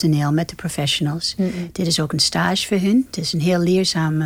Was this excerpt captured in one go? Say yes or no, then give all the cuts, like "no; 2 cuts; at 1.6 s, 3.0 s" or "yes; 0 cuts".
yes; 0 cuts